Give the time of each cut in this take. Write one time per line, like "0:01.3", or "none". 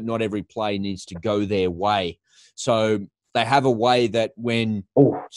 none